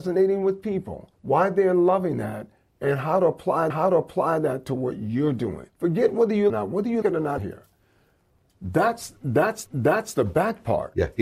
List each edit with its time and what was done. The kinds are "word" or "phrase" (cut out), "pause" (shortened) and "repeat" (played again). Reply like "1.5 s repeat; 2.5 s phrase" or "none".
1.1 s pause; 3.7 s repeat; 5.7 s pause; 6.5 s phrase; 7.0 s word; 7.4 s phrase; 9.7 s repeat

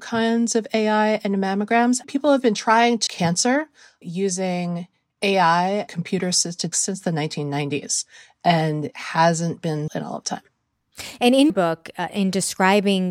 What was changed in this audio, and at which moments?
2.0 s word; 3.1 s word; 4.0 s word; 5.9 s word; 6.7 s word; 8.9 s word; 9.9 s word; 10.2 s word; 11.5 s word

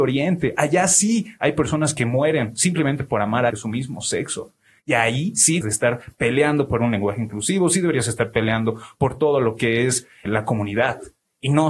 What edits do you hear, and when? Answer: 3.5 s word; 5.6 s word; 10.3 s word

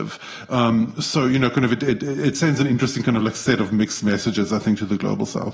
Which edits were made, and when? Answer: none

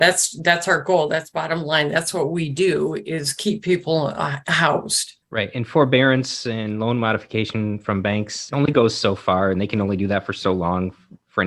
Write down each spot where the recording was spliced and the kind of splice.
5.2 s pause

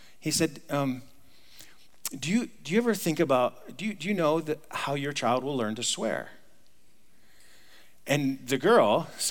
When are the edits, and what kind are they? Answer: none

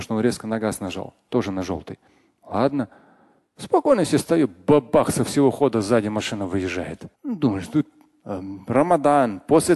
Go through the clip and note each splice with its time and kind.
7.1 s pause

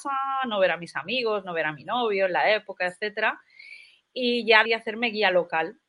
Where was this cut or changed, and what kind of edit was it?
4.7 s word

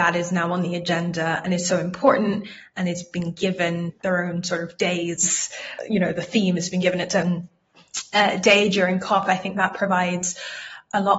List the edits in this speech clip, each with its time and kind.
none

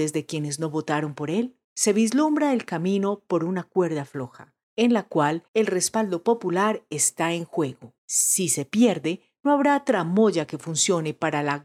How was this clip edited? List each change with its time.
1.6 s pause; 4.6 s pause; 5.5 s pause; 8.0 s pause

